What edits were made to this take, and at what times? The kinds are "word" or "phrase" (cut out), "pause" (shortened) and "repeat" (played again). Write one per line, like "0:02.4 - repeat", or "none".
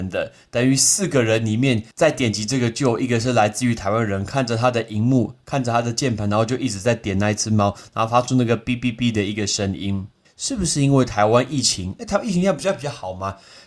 0:01.9 - pause
0:10.2 - pause